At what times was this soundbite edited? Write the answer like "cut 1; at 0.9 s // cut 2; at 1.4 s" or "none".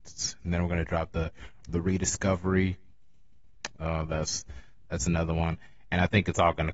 none